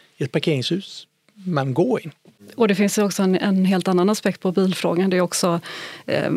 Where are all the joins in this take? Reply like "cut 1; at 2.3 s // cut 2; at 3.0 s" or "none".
none